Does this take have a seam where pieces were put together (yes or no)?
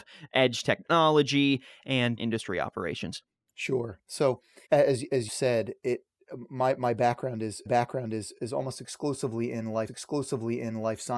yes